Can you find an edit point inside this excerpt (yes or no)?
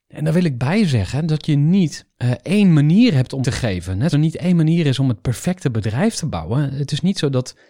yes